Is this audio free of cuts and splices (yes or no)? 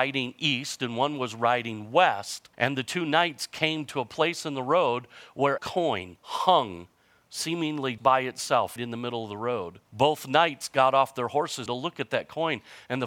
no